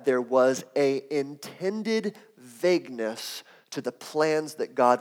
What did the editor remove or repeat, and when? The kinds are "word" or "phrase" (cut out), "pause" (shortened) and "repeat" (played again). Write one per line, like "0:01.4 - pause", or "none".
none